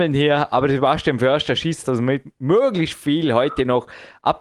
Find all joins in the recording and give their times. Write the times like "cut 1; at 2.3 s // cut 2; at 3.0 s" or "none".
cut 1; at 1.8 s